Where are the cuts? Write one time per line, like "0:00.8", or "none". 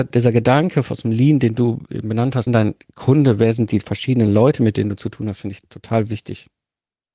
0:02.5